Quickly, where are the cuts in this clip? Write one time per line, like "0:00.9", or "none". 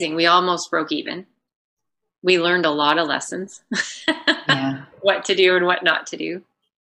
none